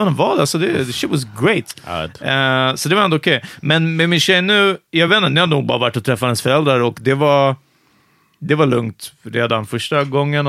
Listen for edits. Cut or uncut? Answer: uncut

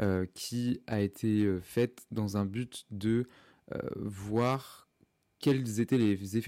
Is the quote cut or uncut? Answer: uncut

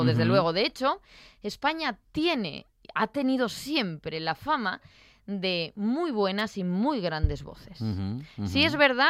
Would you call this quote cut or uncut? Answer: uncut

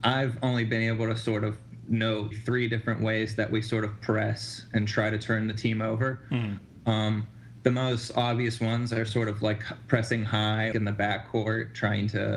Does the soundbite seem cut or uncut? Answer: cut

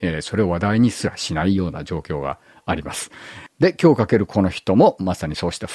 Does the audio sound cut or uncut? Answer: uncut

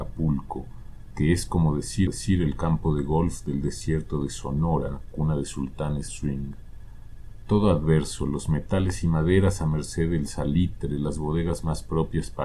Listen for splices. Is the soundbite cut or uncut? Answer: cut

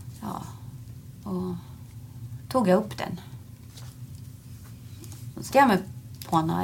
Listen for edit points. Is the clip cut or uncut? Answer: cut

